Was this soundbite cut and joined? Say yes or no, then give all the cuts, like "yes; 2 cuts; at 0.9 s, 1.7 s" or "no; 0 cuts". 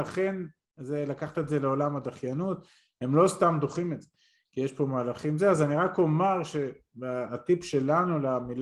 no; 0 cuts